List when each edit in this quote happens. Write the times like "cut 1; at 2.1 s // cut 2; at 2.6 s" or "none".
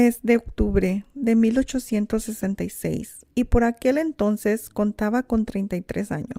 cut 1; at 3.3 s